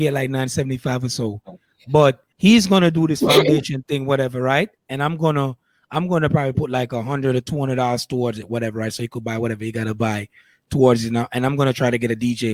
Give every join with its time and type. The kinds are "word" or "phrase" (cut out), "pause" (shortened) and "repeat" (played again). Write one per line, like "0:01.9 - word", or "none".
0:02.3 - pause